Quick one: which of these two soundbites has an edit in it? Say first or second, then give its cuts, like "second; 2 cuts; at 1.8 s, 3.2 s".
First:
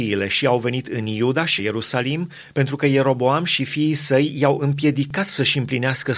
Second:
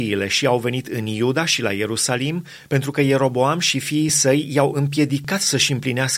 first; 1 cut; at 1.6 s